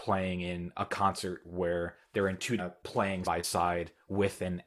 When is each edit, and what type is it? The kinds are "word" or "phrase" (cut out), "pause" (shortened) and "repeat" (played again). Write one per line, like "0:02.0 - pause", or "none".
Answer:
0:02.6 - phrase
0:03.2 - word